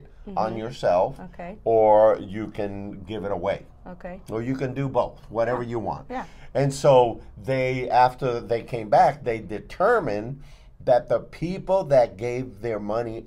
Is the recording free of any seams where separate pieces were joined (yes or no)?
yes